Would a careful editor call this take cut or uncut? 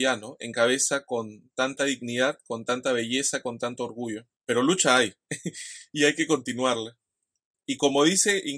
cut